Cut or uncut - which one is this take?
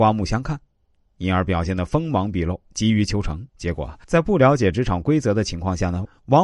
cut